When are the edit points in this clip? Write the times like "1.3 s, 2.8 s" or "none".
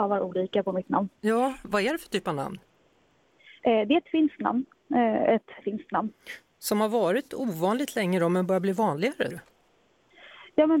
5.6 s, 9.3 s